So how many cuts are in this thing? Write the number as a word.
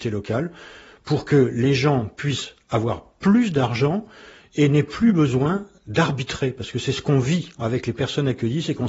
zero